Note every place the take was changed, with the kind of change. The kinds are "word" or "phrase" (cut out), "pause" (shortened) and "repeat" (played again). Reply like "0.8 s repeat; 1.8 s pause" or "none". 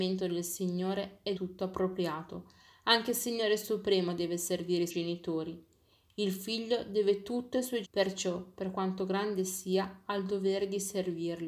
1.4 s word; 4.9 s word; 7.8 s word